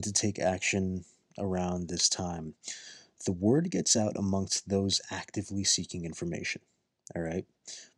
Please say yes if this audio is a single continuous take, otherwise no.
yes